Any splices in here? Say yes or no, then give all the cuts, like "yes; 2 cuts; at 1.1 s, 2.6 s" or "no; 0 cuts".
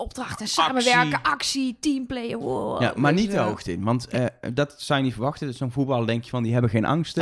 no; 0 cuts